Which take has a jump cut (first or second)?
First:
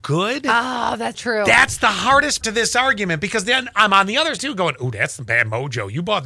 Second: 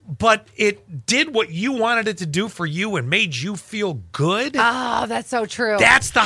first